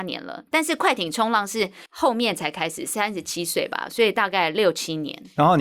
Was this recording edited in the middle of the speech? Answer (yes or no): yes